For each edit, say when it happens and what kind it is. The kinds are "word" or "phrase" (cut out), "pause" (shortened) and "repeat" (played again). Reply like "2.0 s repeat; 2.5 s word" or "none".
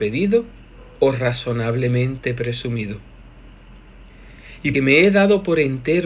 4.7 s word